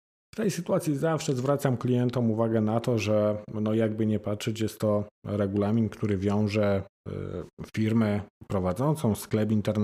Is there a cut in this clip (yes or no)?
no